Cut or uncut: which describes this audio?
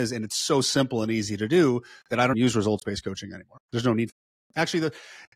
cut